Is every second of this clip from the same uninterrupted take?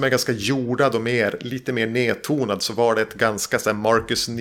yes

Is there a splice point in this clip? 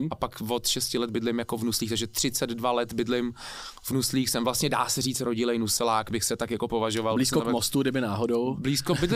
no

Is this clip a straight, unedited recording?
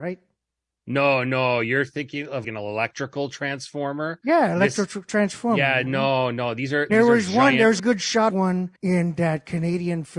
no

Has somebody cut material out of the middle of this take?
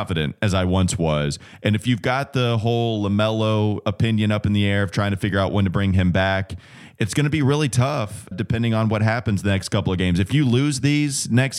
yes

